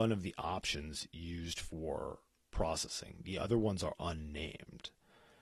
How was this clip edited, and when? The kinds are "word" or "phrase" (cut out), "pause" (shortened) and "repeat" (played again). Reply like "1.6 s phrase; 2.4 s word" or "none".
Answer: none